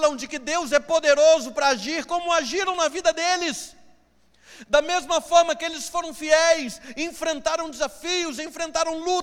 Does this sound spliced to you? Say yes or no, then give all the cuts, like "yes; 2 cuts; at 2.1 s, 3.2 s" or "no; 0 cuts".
no; 0 cuts